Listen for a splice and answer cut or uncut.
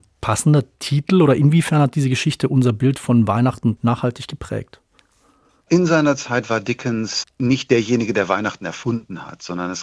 cut